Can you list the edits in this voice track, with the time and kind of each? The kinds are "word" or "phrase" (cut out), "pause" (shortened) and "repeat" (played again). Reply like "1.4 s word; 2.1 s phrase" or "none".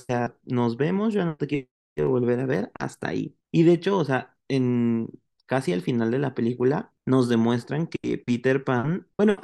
none

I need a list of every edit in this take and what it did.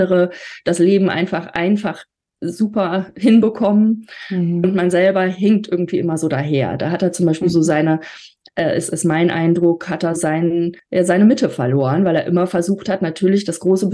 10.2 s word; 10.8 s pause

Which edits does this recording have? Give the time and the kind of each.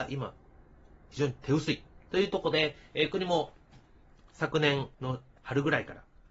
none

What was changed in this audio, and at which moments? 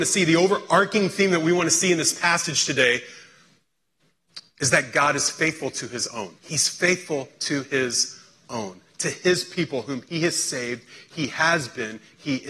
6.4 s pause

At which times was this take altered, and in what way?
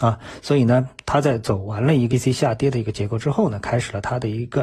2.1 s word

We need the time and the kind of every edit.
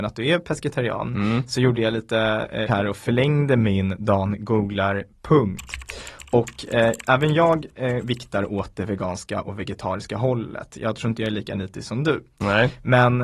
2.7 s word

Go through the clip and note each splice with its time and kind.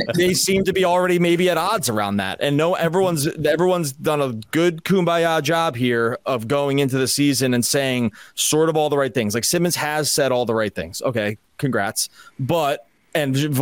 none

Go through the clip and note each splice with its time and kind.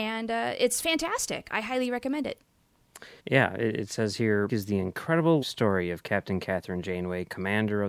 3.2 s pause; 4.5 s word; 5.4 s word

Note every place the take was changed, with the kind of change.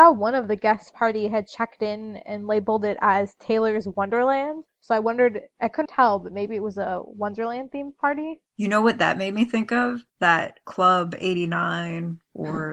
0.9 s phrase; 5.8 s word; 8.5 s pause; 10.1 s pause

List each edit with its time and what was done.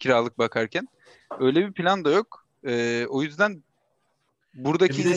none

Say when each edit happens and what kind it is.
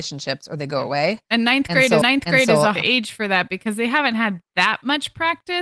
2.0 s repeat; 2.8 s word; 4.5 s pause

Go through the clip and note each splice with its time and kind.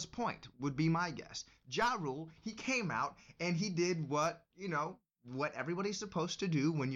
none

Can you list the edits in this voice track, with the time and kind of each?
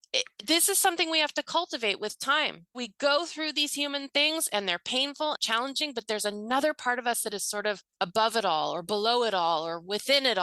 2.7 s word; 5.3 s phrase; 7.9 s pause

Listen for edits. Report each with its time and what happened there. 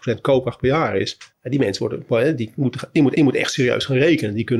1.3 s pause; 3.1 s repeat

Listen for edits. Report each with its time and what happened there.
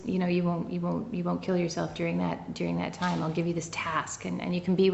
none

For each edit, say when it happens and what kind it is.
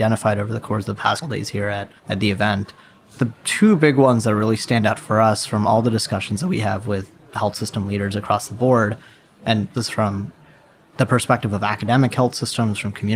1.2 s word; 2.0 s pause; 9.7 s phrase

